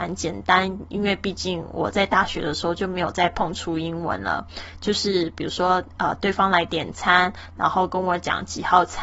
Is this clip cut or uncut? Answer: uncut